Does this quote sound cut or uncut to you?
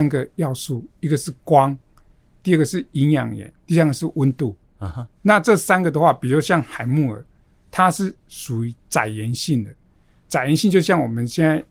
cut